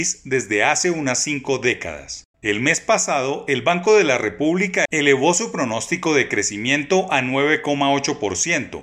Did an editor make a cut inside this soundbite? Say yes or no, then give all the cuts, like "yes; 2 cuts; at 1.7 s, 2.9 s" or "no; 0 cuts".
no; 0 cuts